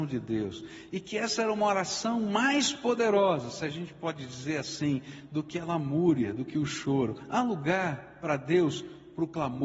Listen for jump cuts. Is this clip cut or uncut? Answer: uncut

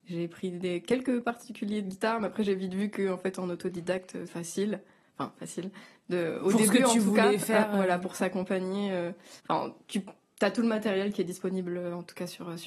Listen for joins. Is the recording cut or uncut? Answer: cut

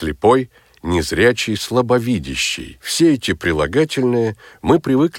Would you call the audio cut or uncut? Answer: cut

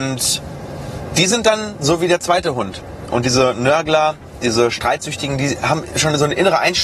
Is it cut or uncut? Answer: uncut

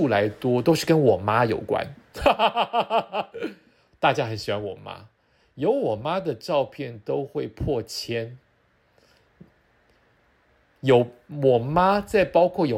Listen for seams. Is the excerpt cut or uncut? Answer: uncut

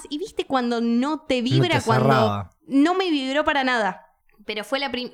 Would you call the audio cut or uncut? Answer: cut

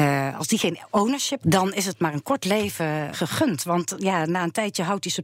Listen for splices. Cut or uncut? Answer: cut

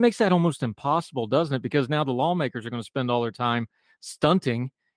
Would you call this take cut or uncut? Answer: uncut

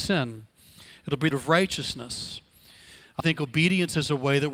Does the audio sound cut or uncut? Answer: cut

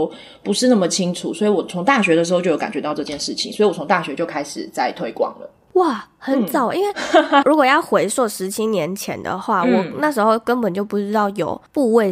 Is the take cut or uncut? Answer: cut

